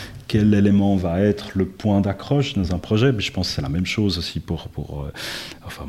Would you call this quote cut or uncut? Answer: uncut